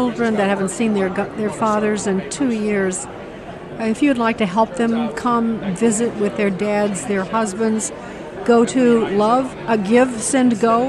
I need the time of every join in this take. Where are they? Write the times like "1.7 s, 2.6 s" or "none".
none